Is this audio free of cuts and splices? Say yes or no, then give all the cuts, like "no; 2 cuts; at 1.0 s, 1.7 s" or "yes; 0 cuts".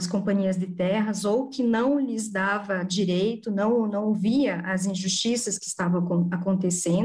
yes; 0 cuts